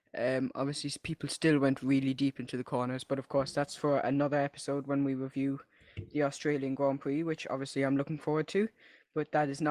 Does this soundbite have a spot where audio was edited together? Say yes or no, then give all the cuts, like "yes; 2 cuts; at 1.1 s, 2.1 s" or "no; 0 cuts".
no; 0 cuts